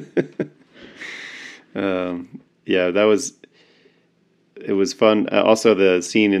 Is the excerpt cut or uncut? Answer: cut